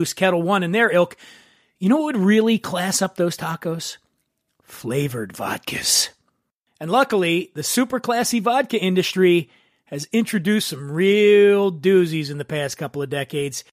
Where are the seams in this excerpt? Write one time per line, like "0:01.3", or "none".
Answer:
none